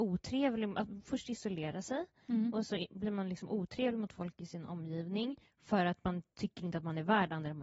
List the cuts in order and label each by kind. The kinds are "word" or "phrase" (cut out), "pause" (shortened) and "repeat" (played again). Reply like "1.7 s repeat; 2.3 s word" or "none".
none